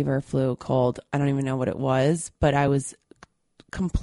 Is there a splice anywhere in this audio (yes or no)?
no